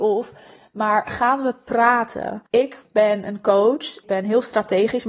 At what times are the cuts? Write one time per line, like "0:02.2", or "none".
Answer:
0:02.5
0:04.0